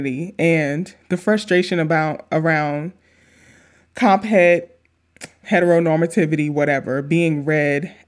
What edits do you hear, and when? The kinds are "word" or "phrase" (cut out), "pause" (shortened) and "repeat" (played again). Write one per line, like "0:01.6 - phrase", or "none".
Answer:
0:05.4 - word